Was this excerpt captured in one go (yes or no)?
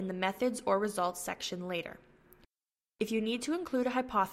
yes